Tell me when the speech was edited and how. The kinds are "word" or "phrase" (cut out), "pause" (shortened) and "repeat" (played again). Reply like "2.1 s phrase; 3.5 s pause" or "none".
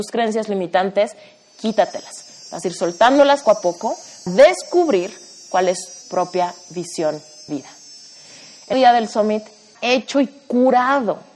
3.4 s word; 4.3 s word; 6.0 s word; 7.5 s word; 8.7 s word; 9.7 s word